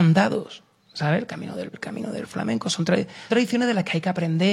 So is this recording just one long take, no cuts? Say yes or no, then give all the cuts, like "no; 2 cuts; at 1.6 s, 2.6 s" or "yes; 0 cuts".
no; 2 cuts; at 1.7 s, 3.3 s